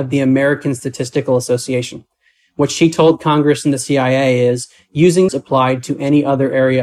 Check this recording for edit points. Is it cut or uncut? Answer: cut